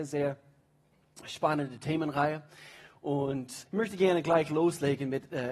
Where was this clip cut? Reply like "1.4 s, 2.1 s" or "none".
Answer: 3.7 s